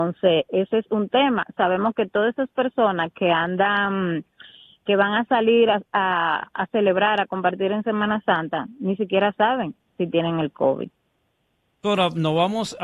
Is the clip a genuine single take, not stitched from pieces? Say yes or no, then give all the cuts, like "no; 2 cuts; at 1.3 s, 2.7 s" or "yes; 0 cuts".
yes; 0 cuts